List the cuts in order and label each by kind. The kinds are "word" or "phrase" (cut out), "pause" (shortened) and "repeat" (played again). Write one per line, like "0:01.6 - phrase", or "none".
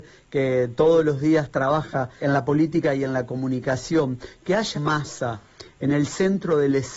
0:02.2 - word
0:04.7 - word